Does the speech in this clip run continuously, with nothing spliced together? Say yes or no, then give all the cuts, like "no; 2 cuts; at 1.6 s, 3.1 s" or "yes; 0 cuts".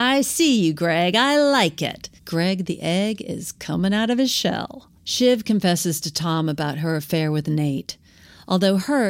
no; 2 cuts; at 2.2 s, 5.0 s